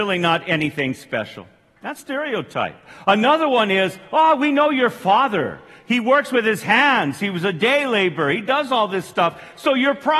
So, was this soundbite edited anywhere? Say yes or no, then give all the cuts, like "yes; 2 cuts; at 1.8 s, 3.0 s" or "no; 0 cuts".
yes; 1 cut; at 2.0 s